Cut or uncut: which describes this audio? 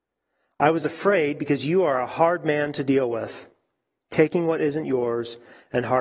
uncut